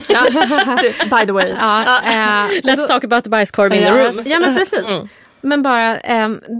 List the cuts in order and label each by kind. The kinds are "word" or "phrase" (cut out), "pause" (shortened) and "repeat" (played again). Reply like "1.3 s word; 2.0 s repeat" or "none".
none

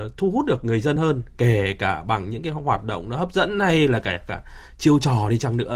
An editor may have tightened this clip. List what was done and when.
none

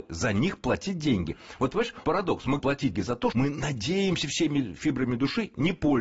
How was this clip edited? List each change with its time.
2.0 s word; 2.6 s word; 2.9 s word; 3.3 s word

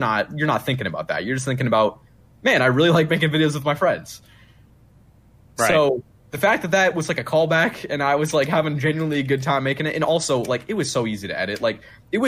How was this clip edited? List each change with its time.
none

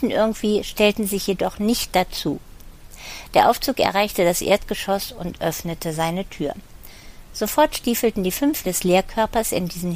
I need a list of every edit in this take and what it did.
8.6 s word

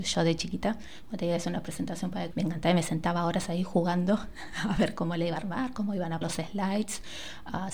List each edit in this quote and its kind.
2.3 s word; 6.2 s word

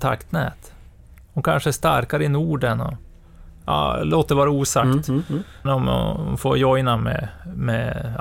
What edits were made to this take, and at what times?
5.7 s word

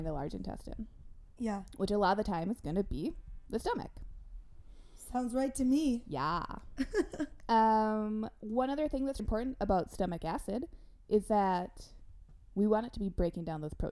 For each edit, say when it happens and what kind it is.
9.2 s word

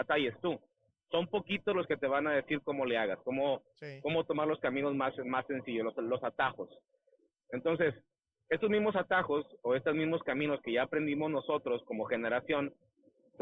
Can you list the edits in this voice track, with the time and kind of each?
none

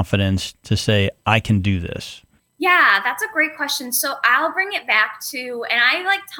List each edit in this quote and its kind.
2.4 s pause

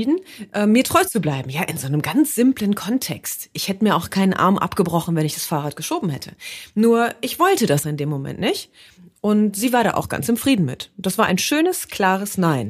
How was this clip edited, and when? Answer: 7.8 s word

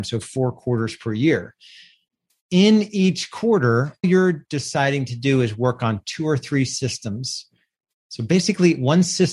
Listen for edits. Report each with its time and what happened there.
4.0 s word

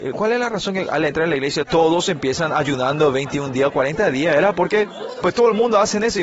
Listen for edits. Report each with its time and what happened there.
1.7 s word; 5.2 s phrase

